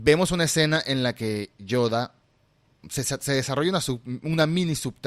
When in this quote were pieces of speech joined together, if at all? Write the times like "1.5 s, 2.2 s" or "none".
none